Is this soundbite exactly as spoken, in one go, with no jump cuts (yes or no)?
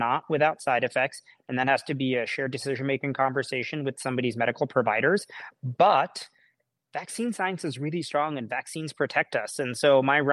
yes